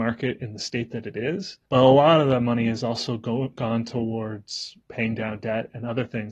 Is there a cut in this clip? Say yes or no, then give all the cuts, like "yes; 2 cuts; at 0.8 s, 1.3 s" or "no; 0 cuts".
yes; 2 cuts; at 1.7 s, 4.8 s